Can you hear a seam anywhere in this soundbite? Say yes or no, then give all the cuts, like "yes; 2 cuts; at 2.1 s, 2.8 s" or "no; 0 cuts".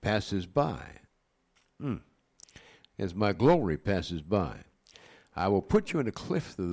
no; 0 cuts